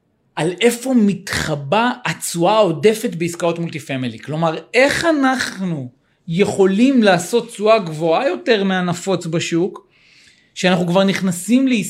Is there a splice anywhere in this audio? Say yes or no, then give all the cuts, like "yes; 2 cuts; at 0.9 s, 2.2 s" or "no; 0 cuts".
no; 0 cuts